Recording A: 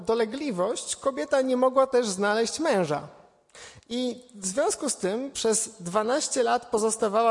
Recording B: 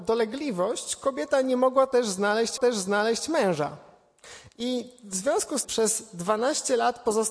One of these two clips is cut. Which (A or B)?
B